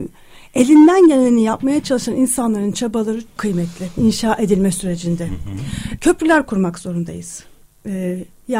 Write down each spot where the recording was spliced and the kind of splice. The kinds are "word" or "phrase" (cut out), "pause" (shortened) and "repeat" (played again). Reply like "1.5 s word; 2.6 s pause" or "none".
3.4 s word; 4.0 s phrase; 6.0 s word